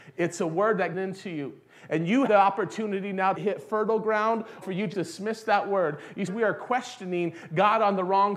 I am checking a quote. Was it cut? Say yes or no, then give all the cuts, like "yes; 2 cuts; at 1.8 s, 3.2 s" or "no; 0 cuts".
yes; 6 cuts; at 0.9 s, 2.3 s, 3.4 s, 4.6 s, 4.9 s, 6.3 s